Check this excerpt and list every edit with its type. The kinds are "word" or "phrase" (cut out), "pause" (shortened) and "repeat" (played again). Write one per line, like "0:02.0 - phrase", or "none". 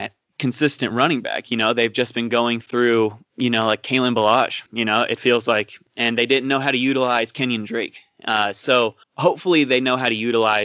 0:03.2 - pause
0:04.7 - pause
0:09.0 - pause